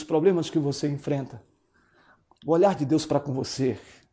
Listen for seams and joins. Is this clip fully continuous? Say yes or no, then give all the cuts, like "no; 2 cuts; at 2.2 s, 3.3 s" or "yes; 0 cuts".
yes; 0 cuts